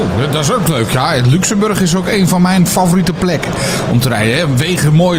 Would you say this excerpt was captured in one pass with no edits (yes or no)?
yes